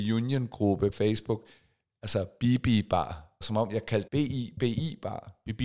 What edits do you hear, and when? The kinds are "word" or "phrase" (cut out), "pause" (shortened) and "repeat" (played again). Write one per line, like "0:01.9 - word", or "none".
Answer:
0:00.9 - word
0:03.4 - word
0:04.1 - word